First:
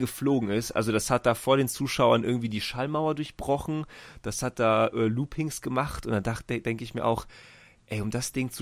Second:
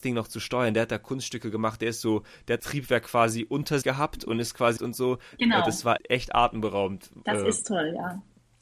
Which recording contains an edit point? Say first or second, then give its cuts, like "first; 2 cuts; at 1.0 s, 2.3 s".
second; 4 cuts; at 2.6 s, 3.8 s, 4.8 s, 6.0 s